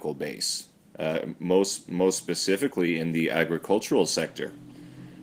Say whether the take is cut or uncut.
uncut